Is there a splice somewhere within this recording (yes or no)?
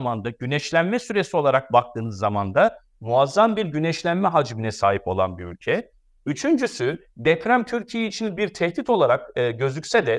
no